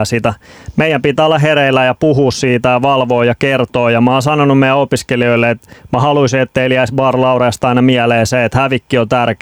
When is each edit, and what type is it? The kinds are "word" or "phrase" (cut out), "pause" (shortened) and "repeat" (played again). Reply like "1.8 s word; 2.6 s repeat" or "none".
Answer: none